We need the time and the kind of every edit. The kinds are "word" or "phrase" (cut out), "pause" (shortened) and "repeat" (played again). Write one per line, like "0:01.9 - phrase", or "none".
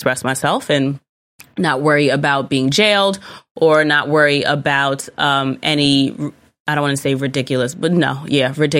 none